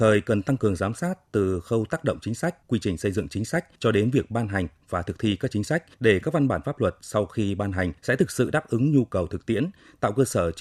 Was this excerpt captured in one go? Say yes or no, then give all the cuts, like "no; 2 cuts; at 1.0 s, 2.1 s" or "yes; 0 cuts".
no; 4 cuts; at 2.6 s, 3.7 s, 5.9 s, 8.0 s